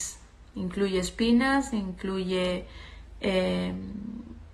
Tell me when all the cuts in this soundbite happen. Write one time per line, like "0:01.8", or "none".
none